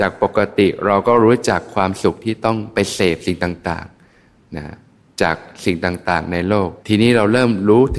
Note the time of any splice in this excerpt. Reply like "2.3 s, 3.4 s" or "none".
6.8 s